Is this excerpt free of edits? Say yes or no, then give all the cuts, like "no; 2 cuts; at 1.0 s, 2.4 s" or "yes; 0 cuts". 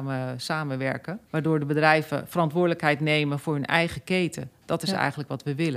no; 1 cut; at 1.3 s